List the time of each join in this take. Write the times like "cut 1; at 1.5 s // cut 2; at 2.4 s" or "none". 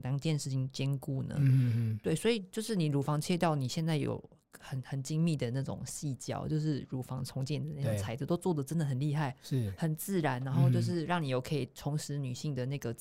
none